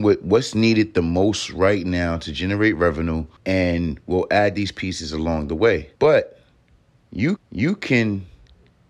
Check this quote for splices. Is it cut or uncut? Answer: cut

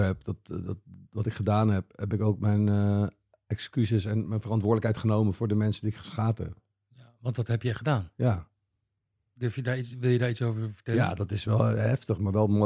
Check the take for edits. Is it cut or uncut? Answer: uncut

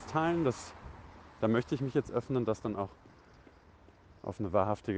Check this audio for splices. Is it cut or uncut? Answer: uncut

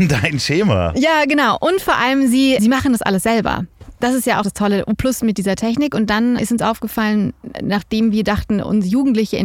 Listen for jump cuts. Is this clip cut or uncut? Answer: cut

